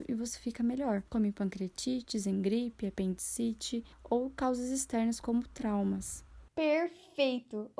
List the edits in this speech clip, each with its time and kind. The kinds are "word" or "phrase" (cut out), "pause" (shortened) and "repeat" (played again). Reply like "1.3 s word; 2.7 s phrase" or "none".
1.1 s pause; 3.9 s pause; 6.5 s pause